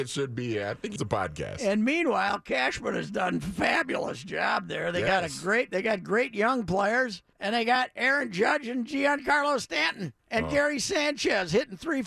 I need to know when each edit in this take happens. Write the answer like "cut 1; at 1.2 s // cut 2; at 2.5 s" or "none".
cut 1; at 1.0 s // cut 2; at 7.3 s // cut 3; at 10.2 s